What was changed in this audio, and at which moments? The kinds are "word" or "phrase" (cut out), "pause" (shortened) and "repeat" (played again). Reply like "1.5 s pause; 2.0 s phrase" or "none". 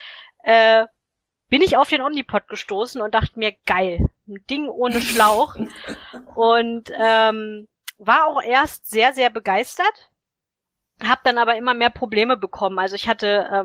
none